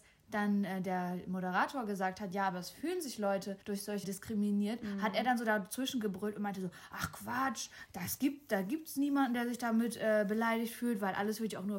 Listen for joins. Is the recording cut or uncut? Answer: cut